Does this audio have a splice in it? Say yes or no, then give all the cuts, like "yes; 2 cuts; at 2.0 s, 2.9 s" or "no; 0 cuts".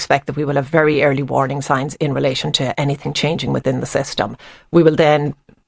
no; 0 cuts